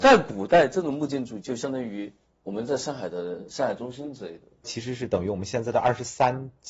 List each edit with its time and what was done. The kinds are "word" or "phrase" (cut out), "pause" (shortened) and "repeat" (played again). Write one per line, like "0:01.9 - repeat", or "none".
none